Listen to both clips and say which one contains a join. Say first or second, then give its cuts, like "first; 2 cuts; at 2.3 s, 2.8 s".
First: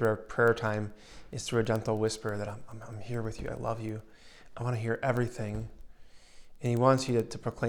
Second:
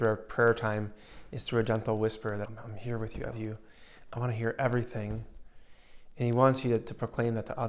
second; 2 cuts; at 2.5 s, 3.3 s